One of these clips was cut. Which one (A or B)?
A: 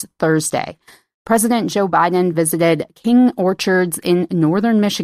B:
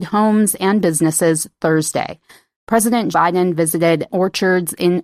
B